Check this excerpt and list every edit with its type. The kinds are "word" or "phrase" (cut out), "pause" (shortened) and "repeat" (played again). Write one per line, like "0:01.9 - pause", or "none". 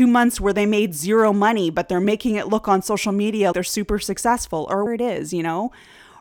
0:03.5 - word
0:04.9 - word